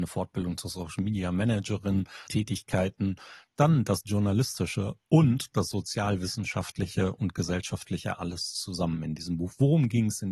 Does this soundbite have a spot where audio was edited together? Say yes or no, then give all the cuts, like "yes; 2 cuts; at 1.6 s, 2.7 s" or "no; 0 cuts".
yes; 1 cut; at 2.3 s